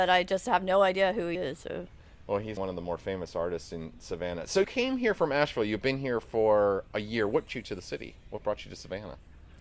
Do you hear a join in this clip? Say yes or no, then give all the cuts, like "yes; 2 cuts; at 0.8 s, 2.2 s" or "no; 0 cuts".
yes; 4 cuts; at 1.3 s, 2.6 s, 4.6 s, 7.5 s